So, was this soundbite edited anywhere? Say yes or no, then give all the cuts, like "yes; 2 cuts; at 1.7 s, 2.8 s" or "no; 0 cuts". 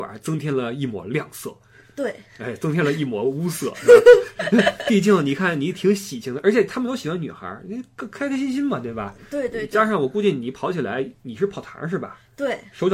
no; 0 cuts